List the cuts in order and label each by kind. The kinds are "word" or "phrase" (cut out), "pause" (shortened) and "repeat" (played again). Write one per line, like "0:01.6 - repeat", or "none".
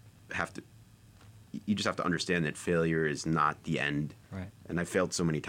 0:04.2 - pause